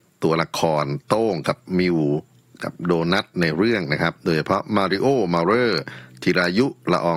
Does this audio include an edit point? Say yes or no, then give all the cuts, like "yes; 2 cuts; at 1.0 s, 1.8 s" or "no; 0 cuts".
no; 0 cuts